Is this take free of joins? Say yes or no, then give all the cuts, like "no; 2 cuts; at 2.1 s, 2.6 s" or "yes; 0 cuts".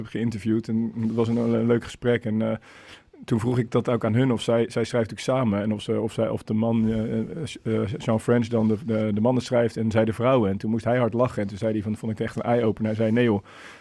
yes; 0 cuts